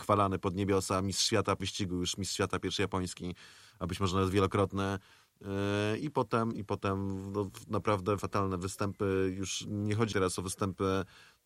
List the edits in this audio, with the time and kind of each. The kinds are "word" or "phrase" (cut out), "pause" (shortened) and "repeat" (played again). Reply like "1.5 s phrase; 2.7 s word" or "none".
1.6 s word; 8.2 s word; 10.1 s word